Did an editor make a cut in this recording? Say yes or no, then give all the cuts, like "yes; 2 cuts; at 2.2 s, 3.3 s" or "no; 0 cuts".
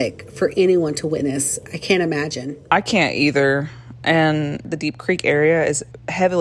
no; 0 cuts